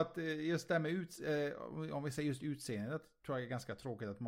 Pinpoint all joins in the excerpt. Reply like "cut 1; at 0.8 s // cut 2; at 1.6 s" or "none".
none